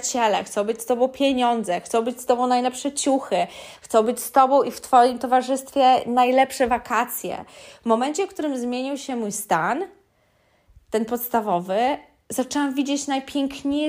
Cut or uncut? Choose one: uncut